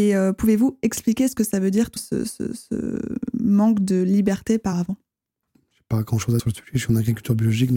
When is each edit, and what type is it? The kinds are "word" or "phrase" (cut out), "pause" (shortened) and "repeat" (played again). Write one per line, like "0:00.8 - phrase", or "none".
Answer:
0:02.0 - word
0:04.7 - word
0:06.4 - word